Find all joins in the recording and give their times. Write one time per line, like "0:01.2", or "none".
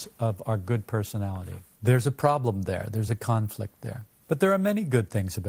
none